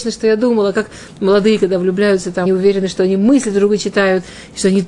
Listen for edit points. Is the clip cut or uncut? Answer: cut